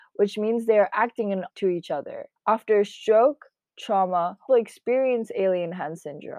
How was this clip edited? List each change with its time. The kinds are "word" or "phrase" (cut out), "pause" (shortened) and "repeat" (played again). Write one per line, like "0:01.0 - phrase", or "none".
0:01.5 - word
0:02.4 - pause
0:04.5 - phrase